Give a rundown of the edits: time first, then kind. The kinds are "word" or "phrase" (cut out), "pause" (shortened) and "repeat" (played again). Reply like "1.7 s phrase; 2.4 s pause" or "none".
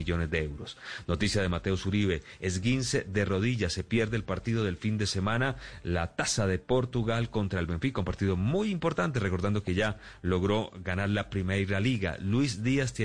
none